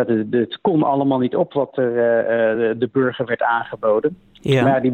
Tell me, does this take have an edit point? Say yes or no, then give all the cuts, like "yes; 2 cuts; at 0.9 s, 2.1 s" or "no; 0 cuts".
no; 0 cuts